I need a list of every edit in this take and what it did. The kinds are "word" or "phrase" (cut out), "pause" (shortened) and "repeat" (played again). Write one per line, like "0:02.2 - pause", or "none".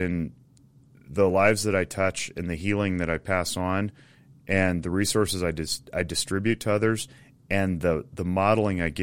none